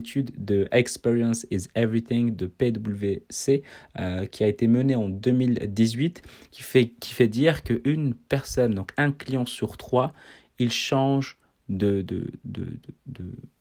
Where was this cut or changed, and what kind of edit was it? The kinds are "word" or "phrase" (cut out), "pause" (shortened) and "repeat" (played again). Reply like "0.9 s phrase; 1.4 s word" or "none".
none